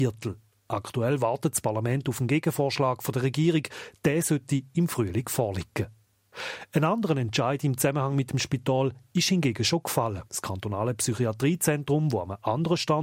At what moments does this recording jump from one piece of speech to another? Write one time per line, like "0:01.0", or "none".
0:10.3